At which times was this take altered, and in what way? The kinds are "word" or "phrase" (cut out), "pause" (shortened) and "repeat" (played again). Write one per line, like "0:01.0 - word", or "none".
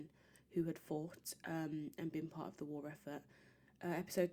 none

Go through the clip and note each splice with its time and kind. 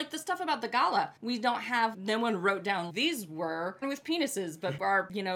0:01.2 - pause
0:01.9 - word
0:02.9 - word
0:03.8 - phrase

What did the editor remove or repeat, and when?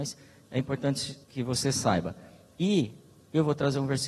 0:01.2 - pause

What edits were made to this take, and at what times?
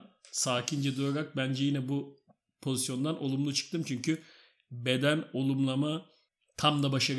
none

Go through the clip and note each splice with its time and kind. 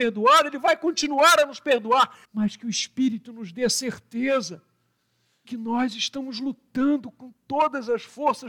0:02.2 - pause
0:05.4 - word

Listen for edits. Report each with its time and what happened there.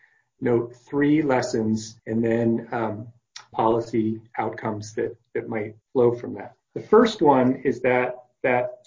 0:02.0 - pause
0:03.5 - phrase
0:05.8 - pause
0:06.6 - pause

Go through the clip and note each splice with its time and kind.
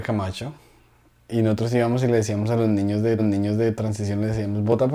0:03.2 - repeat

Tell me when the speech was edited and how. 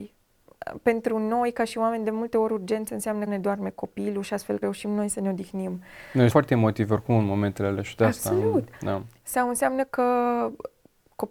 0:03.3 - phrase
0:04.6 - word
0:06.3 - word

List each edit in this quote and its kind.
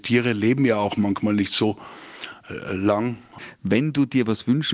none

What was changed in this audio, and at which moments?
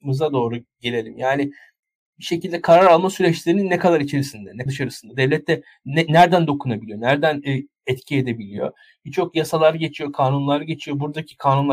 0:04.7 - word

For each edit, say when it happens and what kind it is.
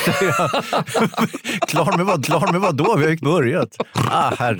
0:02.2 - repeat
0:03.2 - word

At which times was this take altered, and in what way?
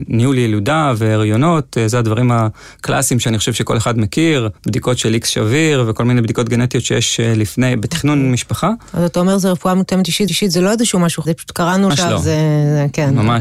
0:04.6 - pause
0:10.3 - repeat
0:11.2 - word
0:11.9 - word

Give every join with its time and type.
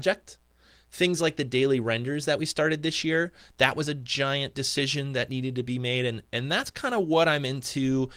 none

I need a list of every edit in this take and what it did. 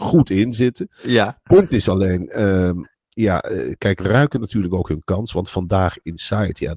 0:04.0 - word

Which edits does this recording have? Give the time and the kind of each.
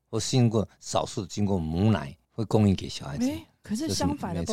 0:02.2 - pause

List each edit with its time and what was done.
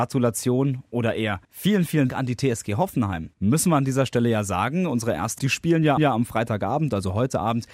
0:01.4 - pause
0:02.1 - word
0:03.3 - pause
0:05.4 - word
0:06.0 - repeat

